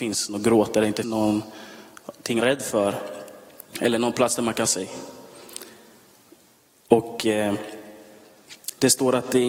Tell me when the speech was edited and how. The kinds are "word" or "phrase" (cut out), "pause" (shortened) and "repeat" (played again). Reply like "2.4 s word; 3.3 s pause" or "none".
1.0 s word; 2.4 s word; 4.6 s word